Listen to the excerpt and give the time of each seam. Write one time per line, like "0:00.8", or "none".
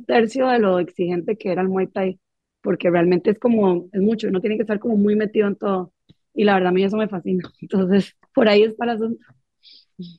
0:08.2